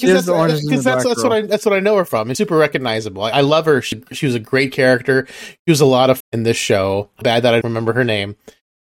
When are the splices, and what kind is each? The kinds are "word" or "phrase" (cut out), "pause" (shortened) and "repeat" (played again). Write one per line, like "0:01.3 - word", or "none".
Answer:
0:02.3 - word
0:03.3 - word
0:03.9 - word
0:06.2 - word
0:07.2 - word
0:07.6 - word